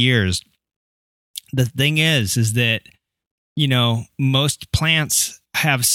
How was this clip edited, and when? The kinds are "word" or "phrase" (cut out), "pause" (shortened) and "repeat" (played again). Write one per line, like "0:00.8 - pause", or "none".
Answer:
none